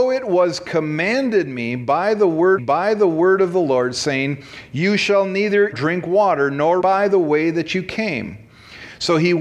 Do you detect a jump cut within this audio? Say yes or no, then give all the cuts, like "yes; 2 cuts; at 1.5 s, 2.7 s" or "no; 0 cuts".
yes; 3 cuts; at 2.6 s, 5.7 s, 6.8 s